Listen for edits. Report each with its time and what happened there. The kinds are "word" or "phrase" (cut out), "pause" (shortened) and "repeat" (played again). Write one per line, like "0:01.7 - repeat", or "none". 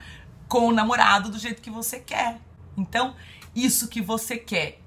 none